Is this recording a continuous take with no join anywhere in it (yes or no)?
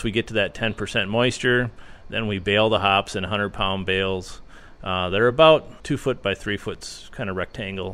yes